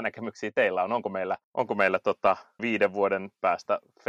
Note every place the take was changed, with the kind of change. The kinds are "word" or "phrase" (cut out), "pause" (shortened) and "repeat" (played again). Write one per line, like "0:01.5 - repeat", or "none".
0:01.4 - pause
0:02.6 - phrase